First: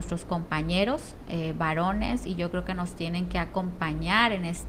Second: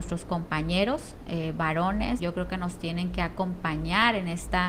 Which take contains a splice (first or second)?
second